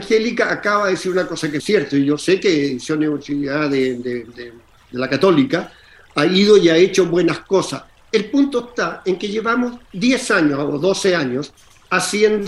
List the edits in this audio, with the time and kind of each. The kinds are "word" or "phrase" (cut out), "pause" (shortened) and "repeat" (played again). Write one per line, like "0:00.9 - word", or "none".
0:01.6 - word
0:09.9 - pause